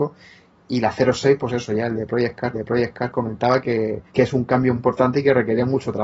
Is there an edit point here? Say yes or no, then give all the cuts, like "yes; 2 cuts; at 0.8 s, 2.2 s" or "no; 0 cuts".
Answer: yes; 3 cuts; at 2.5 s, 4.1 s, 4.8 s